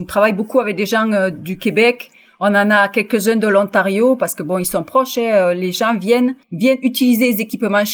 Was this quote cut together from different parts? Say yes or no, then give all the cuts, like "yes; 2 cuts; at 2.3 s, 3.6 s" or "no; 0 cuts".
yes; 1 cut; at 6.4 s